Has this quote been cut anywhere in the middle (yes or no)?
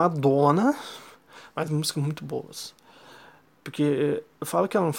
yes